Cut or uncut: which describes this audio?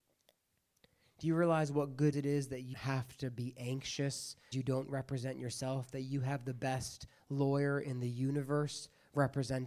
cut